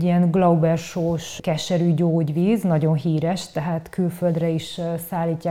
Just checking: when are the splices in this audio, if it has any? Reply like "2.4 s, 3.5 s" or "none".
none